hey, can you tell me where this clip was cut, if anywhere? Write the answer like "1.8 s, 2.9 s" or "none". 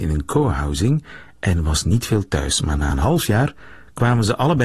none

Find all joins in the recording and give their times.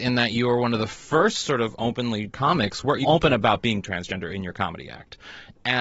2.3 s, 3.0 s

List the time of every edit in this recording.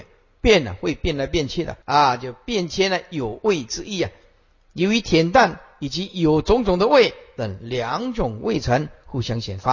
1.8 s

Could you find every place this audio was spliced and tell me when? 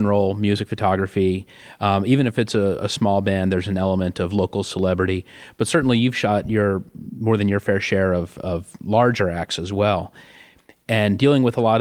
none

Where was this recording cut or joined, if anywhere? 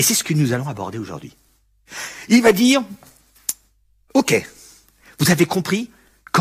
none

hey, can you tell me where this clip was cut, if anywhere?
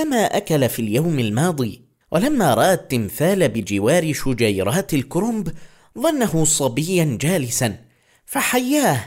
none

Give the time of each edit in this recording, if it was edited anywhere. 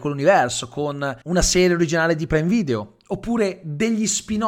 1.2 s

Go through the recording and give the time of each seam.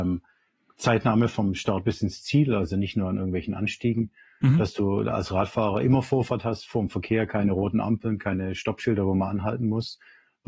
none

